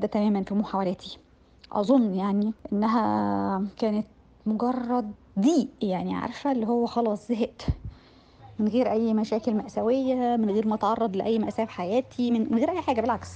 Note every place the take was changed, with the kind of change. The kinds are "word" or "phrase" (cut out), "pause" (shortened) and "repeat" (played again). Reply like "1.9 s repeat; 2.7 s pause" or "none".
none